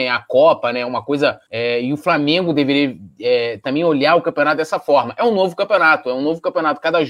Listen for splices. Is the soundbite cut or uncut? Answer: cut